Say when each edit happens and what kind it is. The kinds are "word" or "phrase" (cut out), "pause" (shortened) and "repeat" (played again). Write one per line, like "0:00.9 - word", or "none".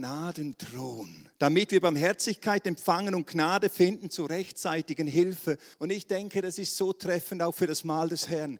0:01.4 - pause
0:05.7 - pause

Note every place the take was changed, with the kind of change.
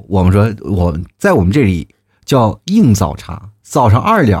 none

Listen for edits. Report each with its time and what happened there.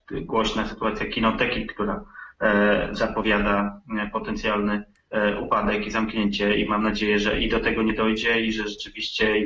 none

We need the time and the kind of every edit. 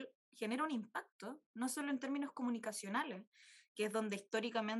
none

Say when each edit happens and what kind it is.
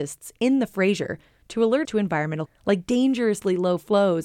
0:01.8 - word
0:02.5 - word

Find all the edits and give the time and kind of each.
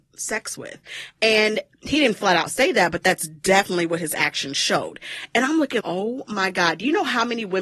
0:05.8 - word

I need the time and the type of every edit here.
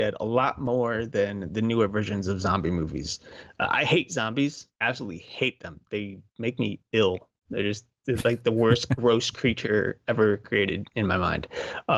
0:04.7 - pause

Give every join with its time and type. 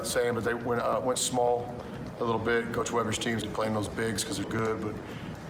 0:03.4 - phrase
0:04.4 - word

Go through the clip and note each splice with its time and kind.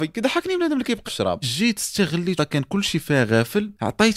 0:01.0 - word
0:01.4 - word
0:02.4 - phrase

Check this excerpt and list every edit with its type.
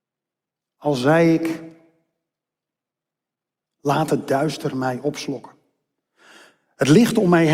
none

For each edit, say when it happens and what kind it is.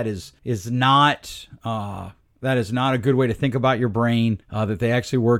none

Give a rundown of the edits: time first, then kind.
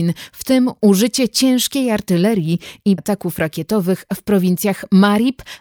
0:03.0 - word

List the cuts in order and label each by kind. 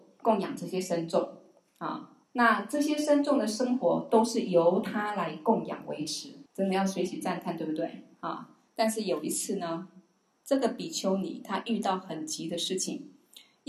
0:02.3 - pause
0:06.5 - pause

